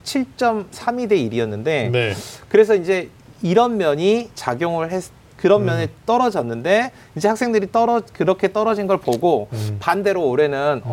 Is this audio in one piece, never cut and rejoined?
yes; 0 cuts

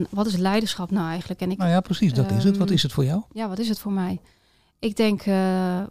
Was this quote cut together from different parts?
no; 0 cuts

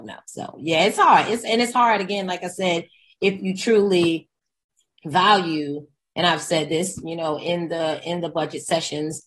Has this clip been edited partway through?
no; 0 cuts

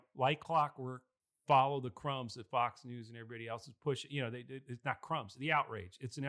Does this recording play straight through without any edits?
yes; 0 cuts

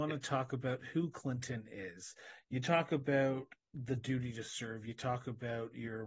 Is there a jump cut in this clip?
no; 0 cuts

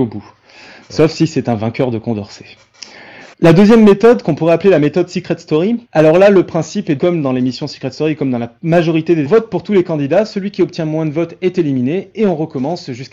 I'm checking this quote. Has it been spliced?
yes; 5 cuts; at 3.3 s, 5.8 s, 7.0 s, 8.6 s, 9.3 s

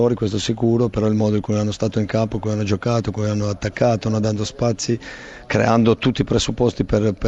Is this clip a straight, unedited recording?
yes; 0 cuts

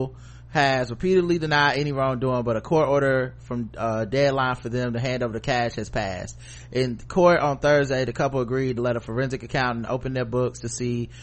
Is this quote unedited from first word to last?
yes; 0 cuts

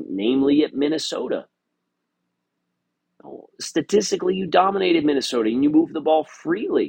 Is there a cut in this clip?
no; 0 cuts

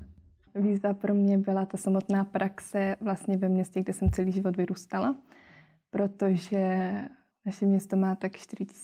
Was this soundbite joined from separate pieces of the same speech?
no; 0 cuts

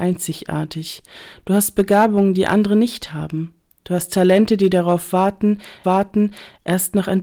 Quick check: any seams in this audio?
yes; 1 cut; at 5.8 s

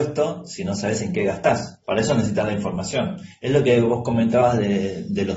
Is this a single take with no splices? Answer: no; 1 cut; at 1.8 s

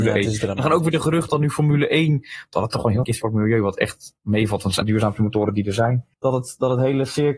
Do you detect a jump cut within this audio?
yes; 4 cuts; at 1.3 s, 3.0 s, 4.8 s, 6.1 s

